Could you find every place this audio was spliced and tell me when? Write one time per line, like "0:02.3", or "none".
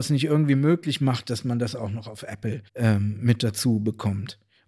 0:02.7